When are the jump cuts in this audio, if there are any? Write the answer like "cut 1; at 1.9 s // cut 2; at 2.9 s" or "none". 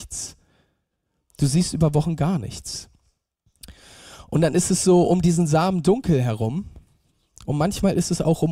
none